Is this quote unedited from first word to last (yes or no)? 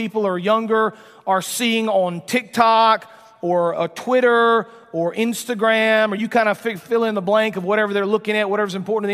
yes